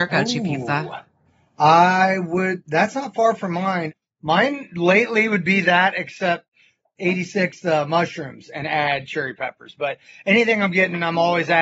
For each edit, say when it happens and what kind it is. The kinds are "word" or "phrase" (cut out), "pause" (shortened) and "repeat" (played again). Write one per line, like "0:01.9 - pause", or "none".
none